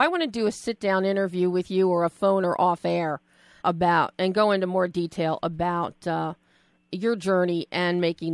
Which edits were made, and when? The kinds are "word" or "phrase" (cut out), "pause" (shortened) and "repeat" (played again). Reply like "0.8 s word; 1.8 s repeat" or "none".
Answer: 3.6 s word